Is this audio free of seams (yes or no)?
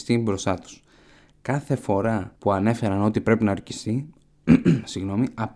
no